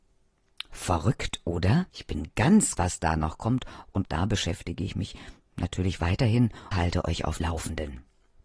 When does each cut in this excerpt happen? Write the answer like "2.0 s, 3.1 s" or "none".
1.9 s, 2.8 s, 4.0 s, 6.7 s, 7.4 s